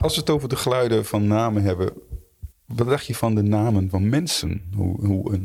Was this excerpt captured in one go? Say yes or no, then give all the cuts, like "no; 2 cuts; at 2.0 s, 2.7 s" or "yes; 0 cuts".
no; 1 cut; at 2.5 s